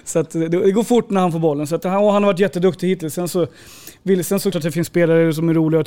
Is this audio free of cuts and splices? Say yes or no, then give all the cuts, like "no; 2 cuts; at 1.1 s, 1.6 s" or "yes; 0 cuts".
no; 1 cut; at 4.5 s